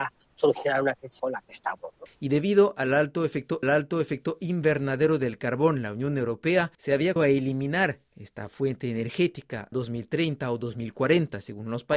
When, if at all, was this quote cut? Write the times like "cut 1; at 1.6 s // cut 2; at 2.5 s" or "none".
cut 1; at 1.2 s // cut 2; at 3.6 s // cut 3; at 6.7 s // cut 4; at 7.2 s // cut 5; at 9.7 s